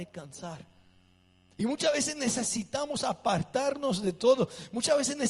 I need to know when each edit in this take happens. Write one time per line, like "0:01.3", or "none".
none